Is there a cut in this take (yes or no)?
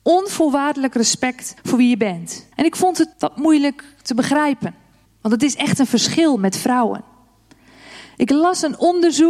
yes